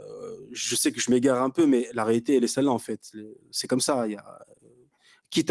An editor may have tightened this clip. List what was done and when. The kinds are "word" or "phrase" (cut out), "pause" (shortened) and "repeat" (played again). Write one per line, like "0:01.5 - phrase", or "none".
0:03.4 - pause